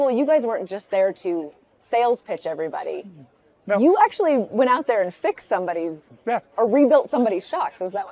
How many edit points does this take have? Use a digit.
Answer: 0